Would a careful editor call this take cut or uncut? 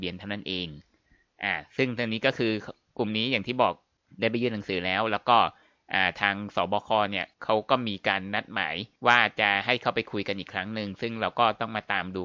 cut